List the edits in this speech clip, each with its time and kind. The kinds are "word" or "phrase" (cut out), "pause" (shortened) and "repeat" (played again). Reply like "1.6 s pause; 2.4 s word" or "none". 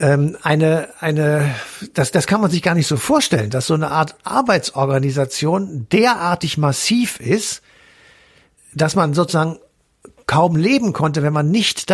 8.6 s word